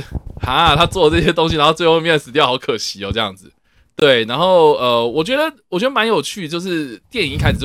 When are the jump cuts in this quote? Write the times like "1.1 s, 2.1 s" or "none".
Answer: none